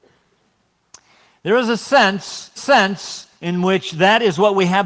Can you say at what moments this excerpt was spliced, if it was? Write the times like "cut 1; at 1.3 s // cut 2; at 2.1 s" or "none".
cut 1; at 2.6 s